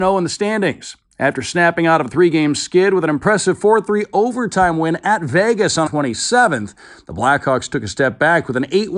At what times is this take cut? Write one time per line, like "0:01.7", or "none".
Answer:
0:05.9